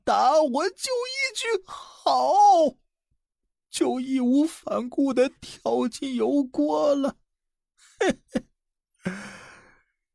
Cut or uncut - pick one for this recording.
uncut